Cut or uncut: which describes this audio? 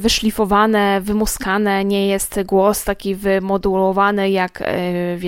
uncut